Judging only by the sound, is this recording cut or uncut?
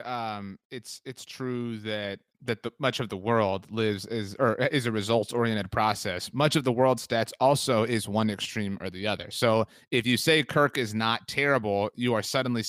cut